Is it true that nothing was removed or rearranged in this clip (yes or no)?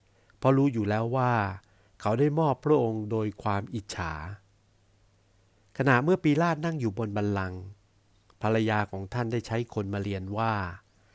yes